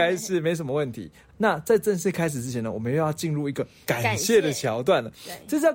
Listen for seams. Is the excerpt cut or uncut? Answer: cut